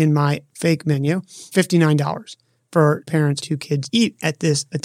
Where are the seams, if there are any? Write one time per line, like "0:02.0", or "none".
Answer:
0:01.5
0:03.1
0:03.4
0:03.9